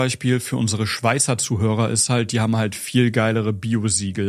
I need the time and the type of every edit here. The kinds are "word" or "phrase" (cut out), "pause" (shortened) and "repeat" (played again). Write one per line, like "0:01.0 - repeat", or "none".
none

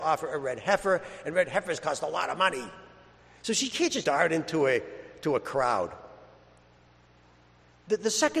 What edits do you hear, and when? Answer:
0:04.0 - word

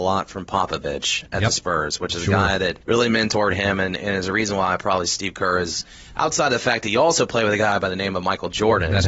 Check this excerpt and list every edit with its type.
0:02.8 - pause

